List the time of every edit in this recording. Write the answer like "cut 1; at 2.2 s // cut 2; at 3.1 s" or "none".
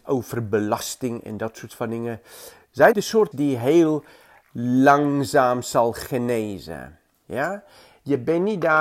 cut 1; at 2.9 s // cut 2; at 3.3 s